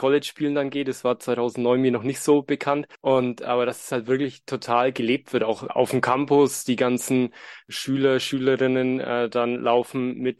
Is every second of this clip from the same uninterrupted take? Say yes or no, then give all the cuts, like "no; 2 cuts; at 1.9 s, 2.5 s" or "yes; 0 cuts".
no; 2 cuts; at 2.9 s, 5.7 s